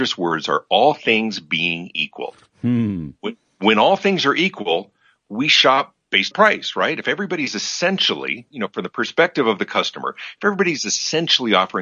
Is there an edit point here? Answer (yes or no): yes